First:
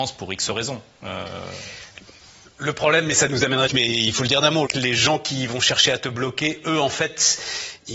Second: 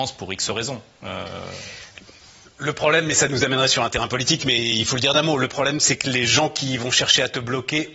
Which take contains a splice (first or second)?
first